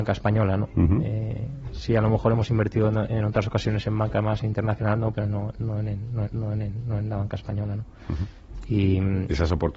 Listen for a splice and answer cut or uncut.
cut